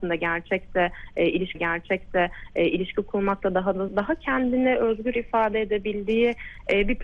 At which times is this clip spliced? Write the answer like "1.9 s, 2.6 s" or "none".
1.5 s, 3.9 s